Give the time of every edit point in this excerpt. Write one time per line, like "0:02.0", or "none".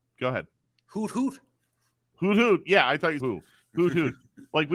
0:03.2